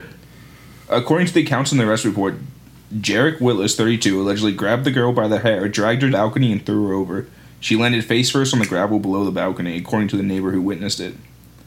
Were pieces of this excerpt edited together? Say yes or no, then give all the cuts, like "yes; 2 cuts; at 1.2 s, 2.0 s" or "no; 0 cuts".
yes; 2 cuts; at 5.4 s, 6.1 s